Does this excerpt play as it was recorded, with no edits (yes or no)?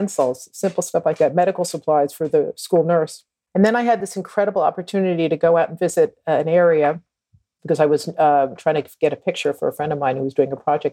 yes